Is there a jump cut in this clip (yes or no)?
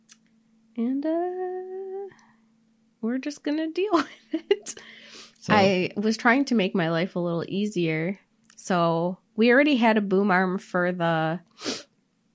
yes